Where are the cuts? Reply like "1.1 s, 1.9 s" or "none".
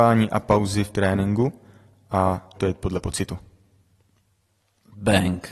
0.9 s, 2.5 s